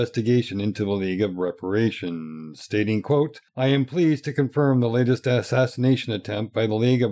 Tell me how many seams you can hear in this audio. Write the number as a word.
one